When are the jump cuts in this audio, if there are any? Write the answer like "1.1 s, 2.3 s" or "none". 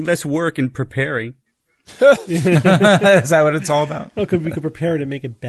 none